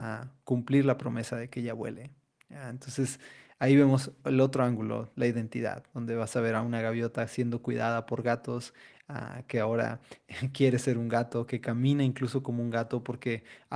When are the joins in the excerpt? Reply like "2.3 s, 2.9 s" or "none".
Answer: none